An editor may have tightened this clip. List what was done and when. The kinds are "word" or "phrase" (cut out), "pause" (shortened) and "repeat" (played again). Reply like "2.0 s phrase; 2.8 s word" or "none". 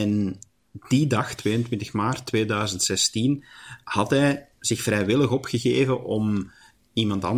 none